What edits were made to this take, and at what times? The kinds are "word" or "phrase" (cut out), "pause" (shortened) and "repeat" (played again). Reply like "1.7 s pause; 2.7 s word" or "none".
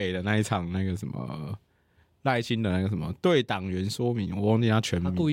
none